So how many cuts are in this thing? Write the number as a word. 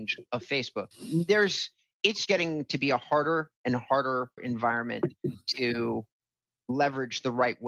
three